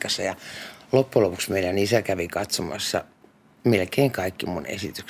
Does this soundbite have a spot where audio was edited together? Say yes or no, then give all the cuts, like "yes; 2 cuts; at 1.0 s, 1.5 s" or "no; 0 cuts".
no; 0 cuts